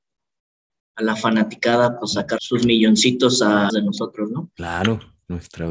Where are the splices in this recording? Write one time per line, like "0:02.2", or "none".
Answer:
0:02.4
0:03.7